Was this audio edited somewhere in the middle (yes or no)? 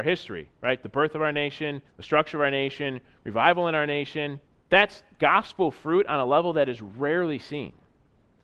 yes